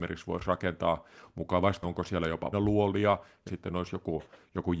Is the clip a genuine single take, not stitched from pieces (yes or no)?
no